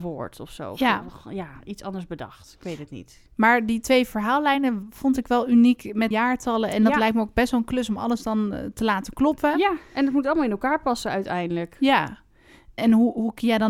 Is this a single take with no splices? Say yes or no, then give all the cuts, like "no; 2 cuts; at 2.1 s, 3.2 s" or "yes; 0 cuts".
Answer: no; 2 cuts; at 6.1 s, 12.8 s